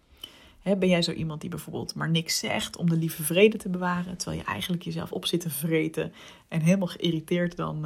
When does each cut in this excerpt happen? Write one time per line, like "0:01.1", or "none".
0:05.1